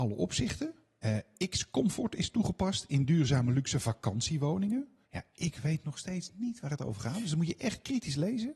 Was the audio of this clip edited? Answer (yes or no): yes